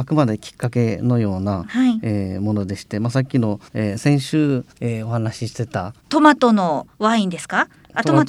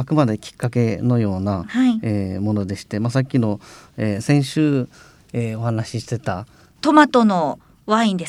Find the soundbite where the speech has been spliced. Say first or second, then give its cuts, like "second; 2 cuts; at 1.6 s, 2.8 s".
first; 4 cuts; at 3.7 s, 4.7 s, 6.0 s, 6.9 s